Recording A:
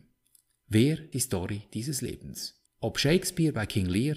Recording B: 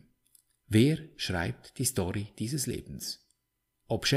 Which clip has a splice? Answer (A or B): A